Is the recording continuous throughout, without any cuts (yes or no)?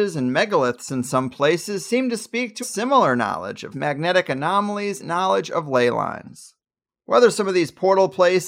no